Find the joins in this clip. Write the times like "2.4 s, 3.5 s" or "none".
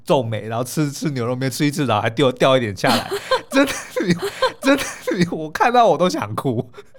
4.2 s